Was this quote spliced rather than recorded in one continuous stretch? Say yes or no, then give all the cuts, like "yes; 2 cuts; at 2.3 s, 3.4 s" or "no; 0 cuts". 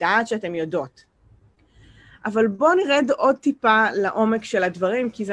no; 0 cuts